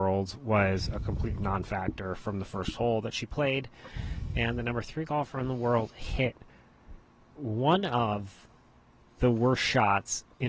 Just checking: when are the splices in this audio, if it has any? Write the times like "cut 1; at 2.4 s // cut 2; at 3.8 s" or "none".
none